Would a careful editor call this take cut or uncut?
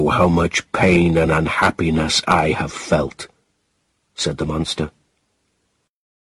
uncut